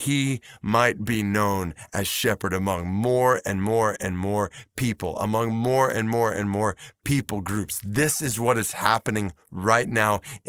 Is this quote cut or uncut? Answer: uncut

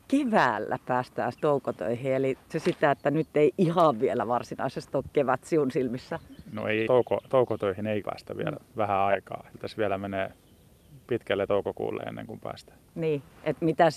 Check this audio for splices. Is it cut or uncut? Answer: cut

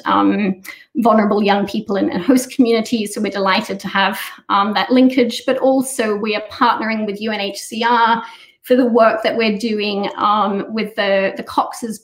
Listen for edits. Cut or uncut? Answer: uncut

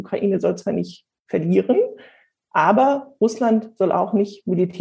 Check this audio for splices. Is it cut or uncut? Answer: uncut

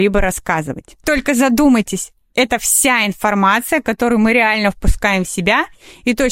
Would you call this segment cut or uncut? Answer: uncut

